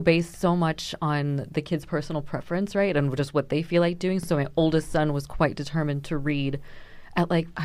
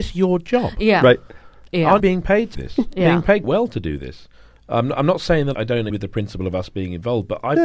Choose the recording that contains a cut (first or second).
second